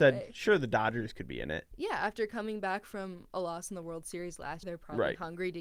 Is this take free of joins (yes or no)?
no